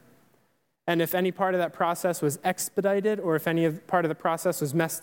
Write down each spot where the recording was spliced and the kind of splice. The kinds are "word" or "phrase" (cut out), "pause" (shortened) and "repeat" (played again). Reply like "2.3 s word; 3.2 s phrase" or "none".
none